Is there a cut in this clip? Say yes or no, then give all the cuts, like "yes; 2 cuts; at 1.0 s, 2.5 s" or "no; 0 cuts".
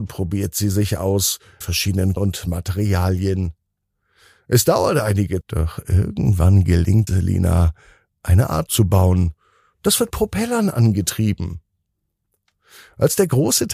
yes; 6 cuts; at 1.6 s, 2.2 s, 5.4 s, 7.1 s, 8.7 s, 10.1 s